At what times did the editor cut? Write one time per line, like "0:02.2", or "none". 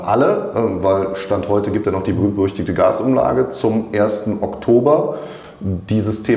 0:01.8